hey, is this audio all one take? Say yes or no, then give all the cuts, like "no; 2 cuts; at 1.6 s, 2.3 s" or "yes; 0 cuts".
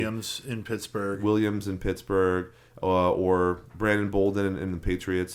yes; 0 cuts